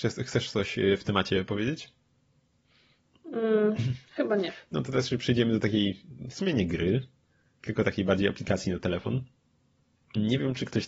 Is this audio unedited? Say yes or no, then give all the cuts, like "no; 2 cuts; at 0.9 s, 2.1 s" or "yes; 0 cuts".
yes; 0 cuts